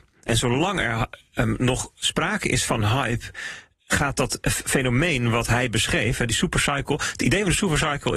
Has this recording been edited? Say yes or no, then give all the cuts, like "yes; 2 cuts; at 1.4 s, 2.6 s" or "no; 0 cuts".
no; 0 cuts